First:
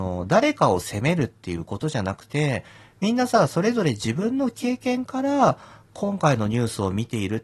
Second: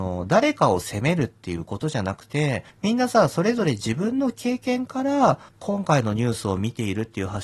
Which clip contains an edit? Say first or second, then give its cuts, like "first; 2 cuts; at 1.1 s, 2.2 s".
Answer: second; 2 cuts; at 2.7 s, 5.5 s